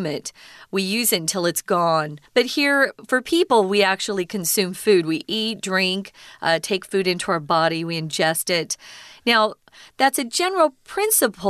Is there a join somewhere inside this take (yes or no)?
yes